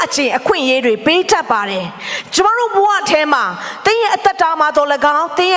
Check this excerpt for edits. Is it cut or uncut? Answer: uncut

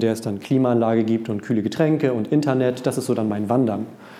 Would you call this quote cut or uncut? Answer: uncut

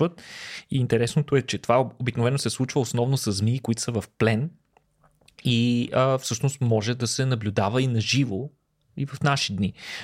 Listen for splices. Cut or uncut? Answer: uncut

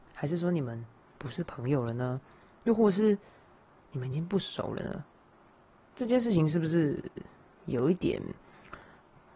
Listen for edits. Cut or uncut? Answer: uncut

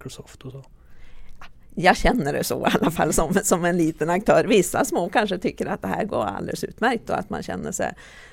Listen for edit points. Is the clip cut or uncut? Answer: uncut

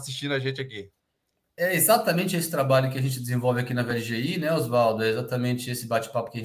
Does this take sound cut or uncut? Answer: uncut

